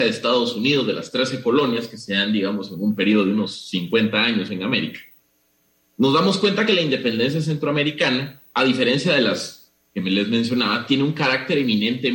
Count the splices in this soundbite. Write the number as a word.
one